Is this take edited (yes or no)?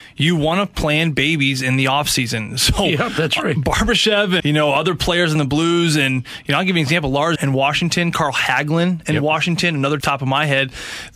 yes